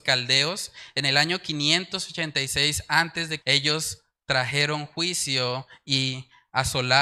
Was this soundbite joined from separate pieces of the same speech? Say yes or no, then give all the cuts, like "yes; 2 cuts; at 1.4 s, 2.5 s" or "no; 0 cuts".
yes; 1 cut; at 3.4 s